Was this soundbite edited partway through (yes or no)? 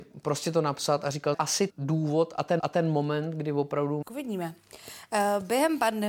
yes